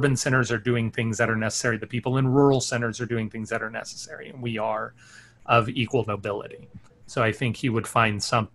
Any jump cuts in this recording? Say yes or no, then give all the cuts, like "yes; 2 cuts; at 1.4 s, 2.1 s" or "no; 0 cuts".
no; 0 cuts